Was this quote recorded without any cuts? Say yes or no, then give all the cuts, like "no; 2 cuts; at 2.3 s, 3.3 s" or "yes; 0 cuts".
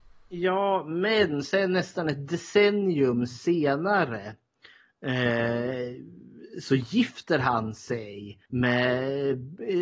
no; 1 cut; at 8.5 s